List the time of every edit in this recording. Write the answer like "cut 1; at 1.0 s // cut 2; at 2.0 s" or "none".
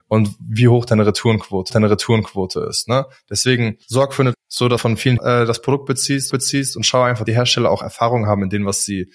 cut 1; at 1.7 s // cut 2; at 3.8 s // cut 3; at 4.3 s // cut 4; at 4.8 s // cut 5; at 5.2 s // cut 6; at 6.3 s // cut 7; at 7.3 s